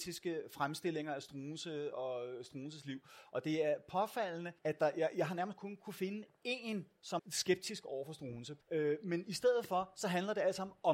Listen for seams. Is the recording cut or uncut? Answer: cut